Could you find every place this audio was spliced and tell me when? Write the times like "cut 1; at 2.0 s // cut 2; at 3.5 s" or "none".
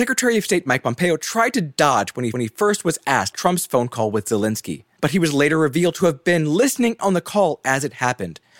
cut 1; at 2.3 s // cut 2; at 3.3 s // cut 3; at 7.0 s